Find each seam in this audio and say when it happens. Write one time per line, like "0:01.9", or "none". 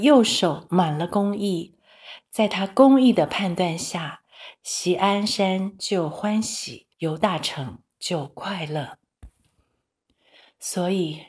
0:06.9